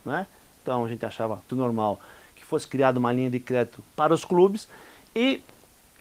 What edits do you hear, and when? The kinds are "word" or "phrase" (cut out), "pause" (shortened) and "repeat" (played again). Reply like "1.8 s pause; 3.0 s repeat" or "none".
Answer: 1.5 s word; 3.9 s pause